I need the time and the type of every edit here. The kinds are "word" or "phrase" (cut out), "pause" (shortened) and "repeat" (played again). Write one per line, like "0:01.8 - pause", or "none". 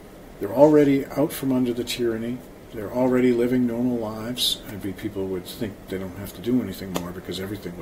0:04.8 - phrase
0:05.4 - word

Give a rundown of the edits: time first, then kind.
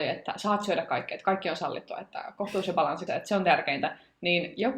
0:03.1 - word

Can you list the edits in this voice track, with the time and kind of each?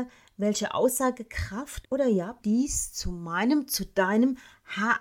0:01.8 - word
0:02.4 - word

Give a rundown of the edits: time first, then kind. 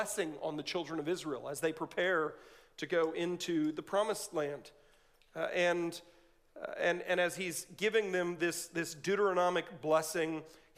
none

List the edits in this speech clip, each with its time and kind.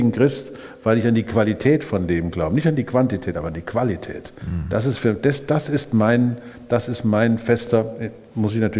none

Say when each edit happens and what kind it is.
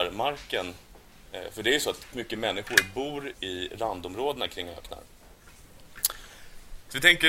0:02.1 - word
0:03.3 - word

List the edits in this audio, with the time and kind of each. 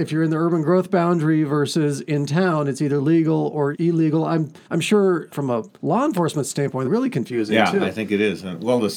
0:03.7 - word
0:04.6 - pause
0:05.3 - word
0:05.8 - pause
0:06.8 - phrase

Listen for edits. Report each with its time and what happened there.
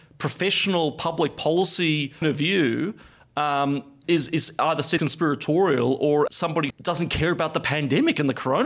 0:02.2 - word
0:04.0 - word
0:05.0 - word
0:06.3 - word
0:06.7 - word

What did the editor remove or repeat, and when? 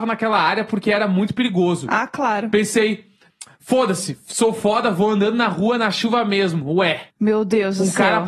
0:07.1 - pause

